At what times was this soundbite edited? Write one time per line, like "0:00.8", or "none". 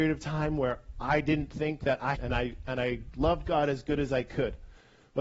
0:02.1